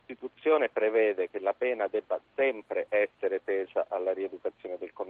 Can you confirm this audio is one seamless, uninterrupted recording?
yes; 0 cuts

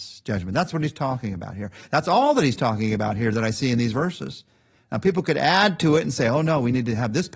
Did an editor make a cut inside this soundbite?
no; 0 cuts

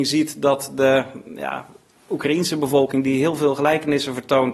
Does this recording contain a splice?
no; 0 cuts

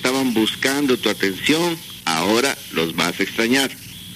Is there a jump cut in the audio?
no; 0 cuts

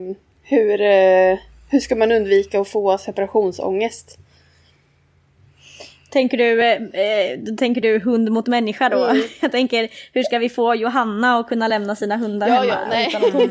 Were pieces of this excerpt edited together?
no; 0 cuts

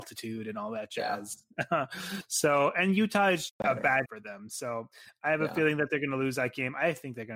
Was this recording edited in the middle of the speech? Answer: yes; 2 cuts; at 3.5 s, 4.0 s

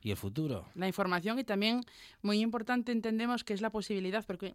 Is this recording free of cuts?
yes; 0 cuts

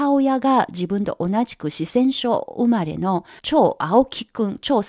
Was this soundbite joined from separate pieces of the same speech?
yes; 1 cut; at 3.4 s

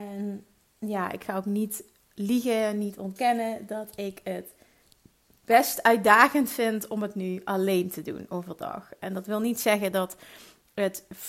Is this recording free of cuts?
yes; 0 cuts

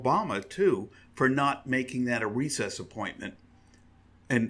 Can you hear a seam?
no; 0 cuts

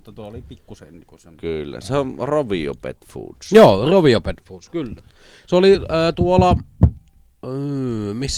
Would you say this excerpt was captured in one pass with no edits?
yes; 0 cuts

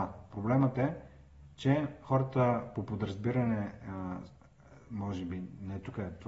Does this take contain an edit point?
no; 0 cuts

